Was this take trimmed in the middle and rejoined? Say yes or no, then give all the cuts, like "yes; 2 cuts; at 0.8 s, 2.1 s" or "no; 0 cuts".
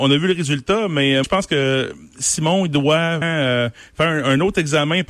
yes; 2 cuts; at 1.2 s, 3.2 s